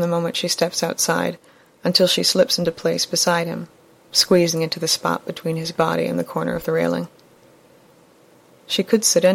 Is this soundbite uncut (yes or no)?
yes